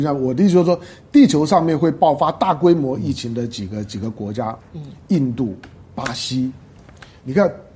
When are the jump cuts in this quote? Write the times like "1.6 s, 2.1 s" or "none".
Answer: 4.6 s